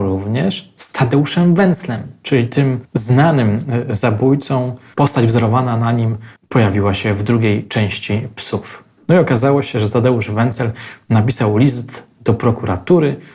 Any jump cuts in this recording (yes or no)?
yes